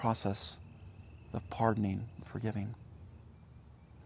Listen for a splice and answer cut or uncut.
uncut